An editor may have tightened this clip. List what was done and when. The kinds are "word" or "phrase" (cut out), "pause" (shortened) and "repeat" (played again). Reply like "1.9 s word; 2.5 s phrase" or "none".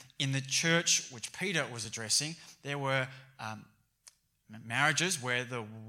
none

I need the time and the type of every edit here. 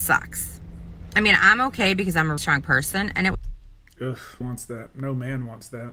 2.4 s word; 4.4 s word

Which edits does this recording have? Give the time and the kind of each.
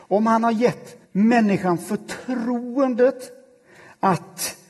1.0 s pause

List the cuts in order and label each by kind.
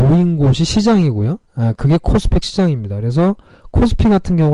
1.5 s pause; 2.4 s word

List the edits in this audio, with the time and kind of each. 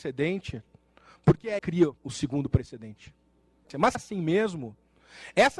1.6 s phrase; 2.0 s pause; 3.9 s word

